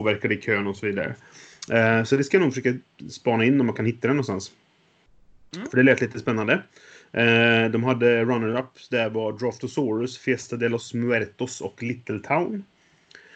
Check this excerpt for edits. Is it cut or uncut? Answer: uncut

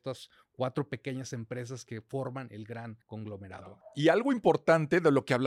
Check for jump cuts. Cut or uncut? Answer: cut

